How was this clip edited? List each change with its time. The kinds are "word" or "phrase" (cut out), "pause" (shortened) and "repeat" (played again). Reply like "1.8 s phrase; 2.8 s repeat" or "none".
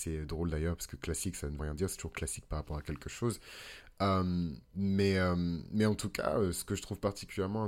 1.6 s word